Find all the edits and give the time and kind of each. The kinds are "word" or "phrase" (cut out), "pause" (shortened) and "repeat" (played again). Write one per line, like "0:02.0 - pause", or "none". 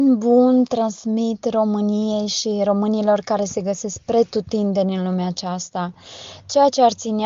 none